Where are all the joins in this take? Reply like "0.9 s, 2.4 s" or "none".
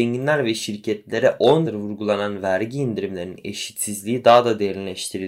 1.7 s